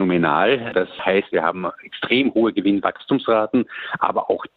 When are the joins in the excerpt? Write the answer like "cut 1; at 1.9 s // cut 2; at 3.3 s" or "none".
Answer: cut 1; at 1.3 s